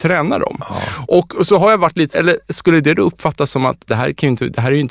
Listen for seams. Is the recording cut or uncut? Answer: cut